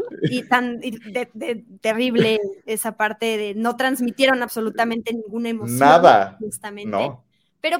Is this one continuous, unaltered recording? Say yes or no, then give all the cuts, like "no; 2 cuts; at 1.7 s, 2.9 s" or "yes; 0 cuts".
yes; 0 cuts